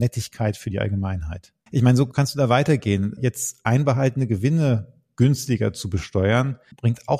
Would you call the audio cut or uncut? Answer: cut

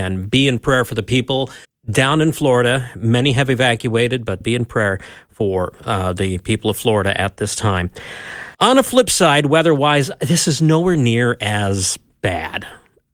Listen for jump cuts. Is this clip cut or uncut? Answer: cut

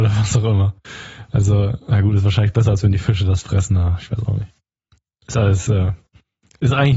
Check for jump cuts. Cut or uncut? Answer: uncut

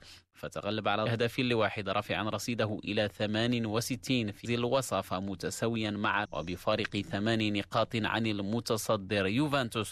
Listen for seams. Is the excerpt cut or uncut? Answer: cut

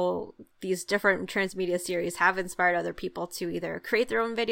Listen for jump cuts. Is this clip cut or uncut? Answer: uncut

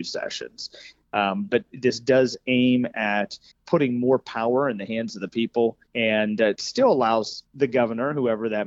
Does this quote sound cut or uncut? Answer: cut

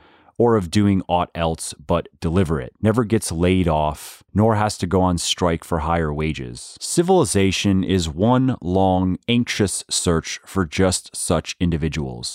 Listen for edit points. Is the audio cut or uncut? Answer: cut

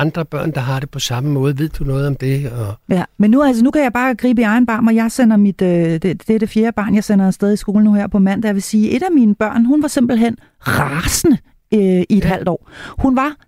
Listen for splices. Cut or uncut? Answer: uncut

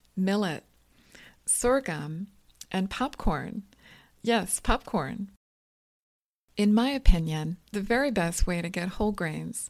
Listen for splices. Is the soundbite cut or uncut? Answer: uncut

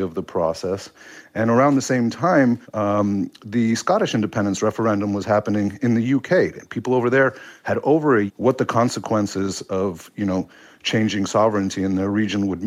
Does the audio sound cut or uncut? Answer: cut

